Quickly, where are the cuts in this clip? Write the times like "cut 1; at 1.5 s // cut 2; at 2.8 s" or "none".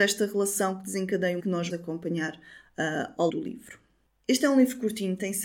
cut 1; at 1.4 s // cut 2; at 1.7 s // cut 3; at 3.3 s